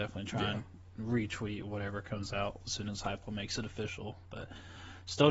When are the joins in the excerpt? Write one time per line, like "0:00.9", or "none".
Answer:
none

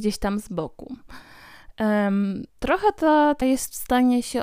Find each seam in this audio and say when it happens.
0:02.5
0:03.4

